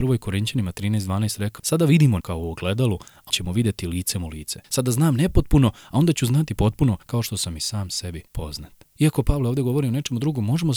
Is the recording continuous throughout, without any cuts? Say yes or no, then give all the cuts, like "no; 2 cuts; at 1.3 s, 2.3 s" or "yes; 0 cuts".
no; 4 cuts; at 1.6 s, 2.2 s, 3.3 s, 7.0 s